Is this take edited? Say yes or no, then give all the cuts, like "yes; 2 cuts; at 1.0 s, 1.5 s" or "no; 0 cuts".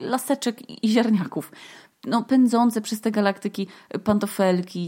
no; 0 cuts